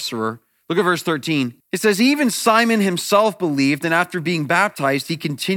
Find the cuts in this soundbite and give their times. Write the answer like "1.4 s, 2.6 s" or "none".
1.6 s